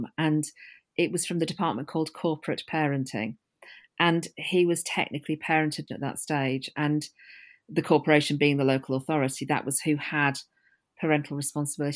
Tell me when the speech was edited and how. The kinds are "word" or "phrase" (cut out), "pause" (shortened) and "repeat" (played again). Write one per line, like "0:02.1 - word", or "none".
0:05.9 - phrase